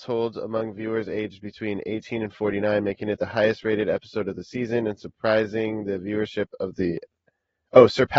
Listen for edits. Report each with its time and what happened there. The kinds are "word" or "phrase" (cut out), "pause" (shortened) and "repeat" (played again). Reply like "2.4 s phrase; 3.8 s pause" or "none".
none